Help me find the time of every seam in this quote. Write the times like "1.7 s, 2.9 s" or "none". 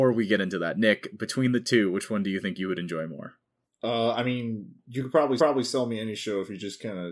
3.6 s, 5.4 s